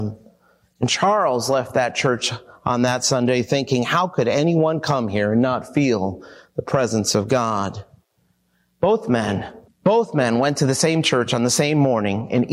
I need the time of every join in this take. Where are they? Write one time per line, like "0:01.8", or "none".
0:09.7